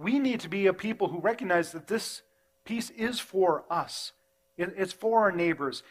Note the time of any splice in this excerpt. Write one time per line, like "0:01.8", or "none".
none